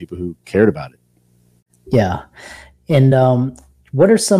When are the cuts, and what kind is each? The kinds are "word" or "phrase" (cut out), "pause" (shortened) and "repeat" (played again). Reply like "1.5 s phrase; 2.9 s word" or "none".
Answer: none